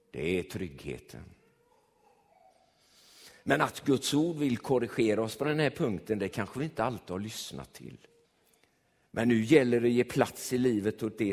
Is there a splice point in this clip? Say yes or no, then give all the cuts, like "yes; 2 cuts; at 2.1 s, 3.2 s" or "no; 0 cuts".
yes; 1 cut; at 8.2 s